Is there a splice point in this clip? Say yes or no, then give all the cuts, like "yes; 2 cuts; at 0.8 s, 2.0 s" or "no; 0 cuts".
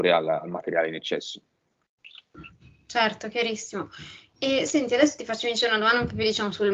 no; 0 cuts